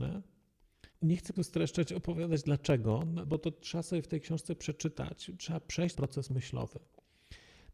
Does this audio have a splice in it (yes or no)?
yes